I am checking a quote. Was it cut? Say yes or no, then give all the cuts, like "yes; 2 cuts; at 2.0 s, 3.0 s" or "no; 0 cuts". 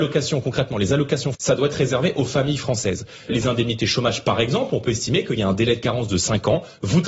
yes; 2 cuts; at 1.3 s, 3.3 s